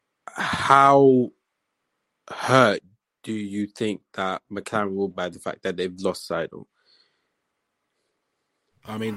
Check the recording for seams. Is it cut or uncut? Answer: cut